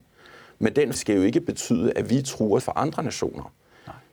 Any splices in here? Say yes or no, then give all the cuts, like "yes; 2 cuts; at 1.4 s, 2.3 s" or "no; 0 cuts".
yes; 2 cuts; at 0.9 s, 2.6 s